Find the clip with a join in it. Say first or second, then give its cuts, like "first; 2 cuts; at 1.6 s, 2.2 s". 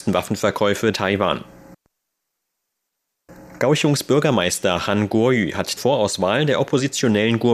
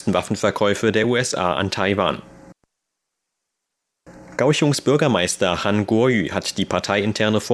first; 2 cuts; at 0.9 s, 5.8 s